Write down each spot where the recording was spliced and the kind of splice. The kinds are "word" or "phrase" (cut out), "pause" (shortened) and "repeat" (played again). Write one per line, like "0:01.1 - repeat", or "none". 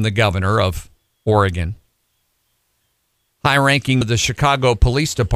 0:04.0 - word